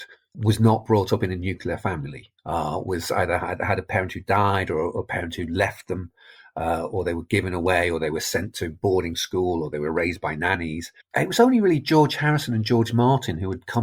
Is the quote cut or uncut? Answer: cut